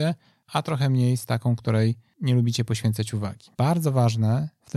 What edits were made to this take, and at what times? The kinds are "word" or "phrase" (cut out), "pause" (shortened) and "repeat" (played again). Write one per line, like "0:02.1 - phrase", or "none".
0:03.5 - pause

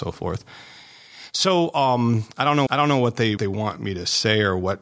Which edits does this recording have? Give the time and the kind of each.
0:02.7 - repeat
0:03.4 - word

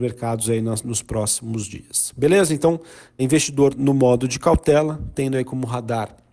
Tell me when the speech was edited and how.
0:03.2 - word

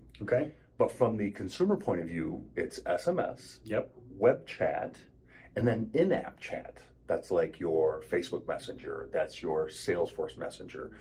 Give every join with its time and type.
none

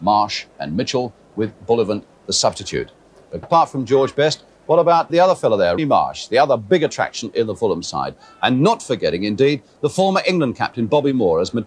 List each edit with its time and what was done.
0:03.4 - word
0:05.1 - word
0:05.8 - word

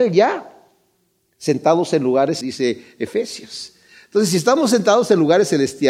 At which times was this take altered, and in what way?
0:02.4 - word

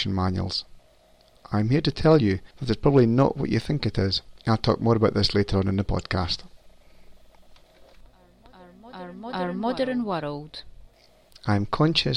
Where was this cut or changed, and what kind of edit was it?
0:02.5 - pause
0:04.4 - pause

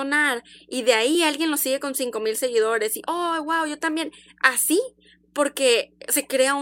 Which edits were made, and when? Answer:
none

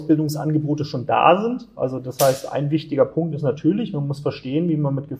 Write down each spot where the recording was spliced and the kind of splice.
none

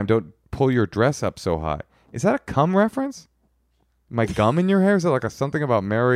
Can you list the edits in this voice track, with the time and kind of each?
none

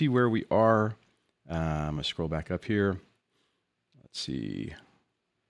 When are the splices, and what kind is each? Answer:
none

